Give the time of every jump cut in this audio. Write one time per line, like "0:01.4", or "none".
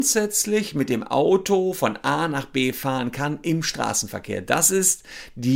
none